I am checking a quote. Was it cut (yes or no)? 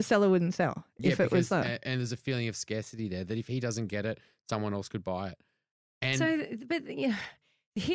no